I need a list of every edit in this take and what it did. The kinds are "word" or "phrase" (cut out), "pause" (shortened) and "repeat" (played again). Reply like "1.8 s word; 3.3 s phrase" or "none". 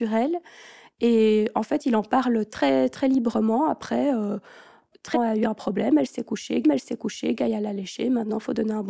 5.1 s phrase; 6.6 s repeat